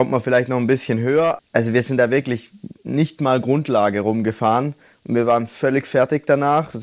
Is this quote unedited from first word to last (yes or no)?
no